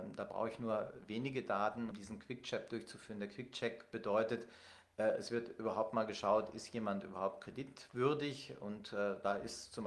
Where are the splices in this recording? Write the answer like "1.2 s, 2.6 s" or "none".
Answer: 1.9 s